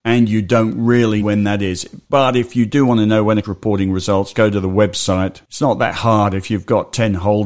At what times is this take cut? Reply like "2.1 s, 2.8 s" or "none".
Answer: 1.2 s, 3.4 s, 4.3 s